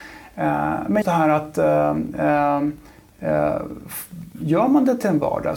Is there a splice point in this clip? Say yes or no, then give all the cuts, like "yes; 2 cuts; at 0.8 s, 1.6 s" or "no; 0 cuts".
yes; 1 cut; at 1.0 s